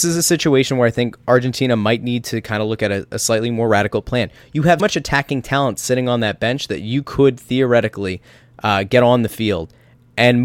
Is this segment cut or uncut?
cut